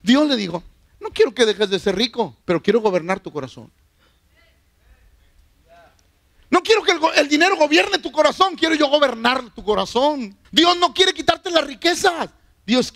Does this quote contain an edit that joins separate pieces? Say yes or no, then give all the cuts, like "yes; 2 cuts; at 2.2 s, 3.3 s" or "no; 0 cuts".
yes; 2 cuts; at 2.4 s, 10.4 s